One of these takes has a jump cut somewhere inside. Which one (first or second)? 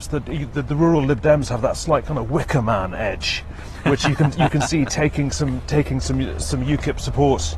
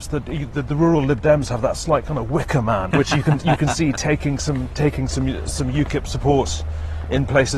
second